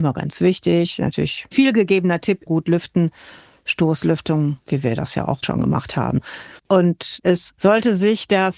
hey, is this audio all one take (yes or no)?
no